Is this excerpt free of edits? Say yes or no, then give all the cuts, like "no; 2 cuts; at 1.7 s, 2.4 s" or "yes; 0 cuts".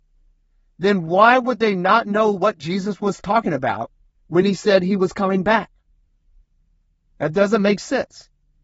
yes; 0 cuts